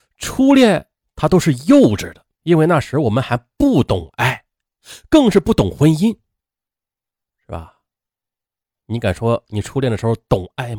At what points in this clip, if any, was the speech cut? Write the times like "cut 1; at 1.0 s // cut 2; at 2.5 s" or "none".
cut 1; at 2.3 s